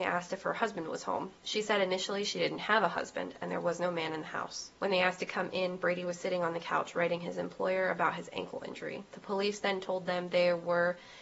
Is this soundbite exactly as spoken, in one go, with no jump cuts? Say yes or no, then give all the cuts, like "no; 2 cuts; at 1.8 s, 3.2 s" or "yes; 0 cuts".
yes; 0 cuts